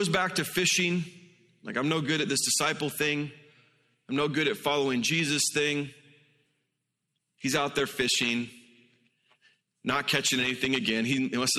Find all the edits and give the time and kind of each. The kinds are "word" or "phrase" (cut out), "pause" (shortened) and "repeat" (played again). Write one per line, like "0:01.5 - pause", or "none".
none